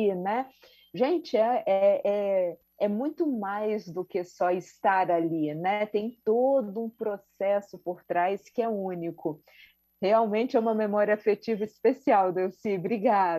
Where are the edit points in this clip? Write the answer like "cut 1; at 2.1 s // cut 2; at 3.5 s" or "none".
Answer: none